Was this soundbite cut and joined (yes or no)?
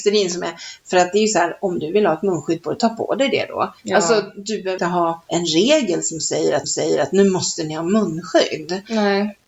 yes